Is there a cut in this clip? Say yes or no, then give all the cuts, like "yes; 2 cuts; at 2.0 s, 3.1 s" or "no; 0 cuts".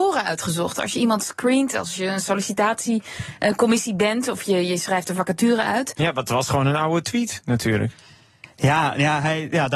no; 0 cuts